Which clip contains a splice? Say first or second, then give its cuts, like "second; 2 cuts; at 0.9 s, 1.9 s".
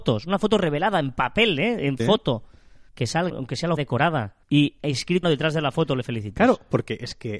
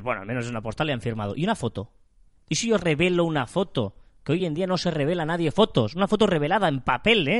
first; 6 cuts; at 2.0 s, 2.9 s, 3.3 s, 3.8 s, 4.4 s, 5.2 s